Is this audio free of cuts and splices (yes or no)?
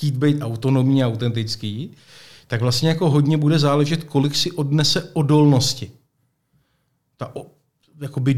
yes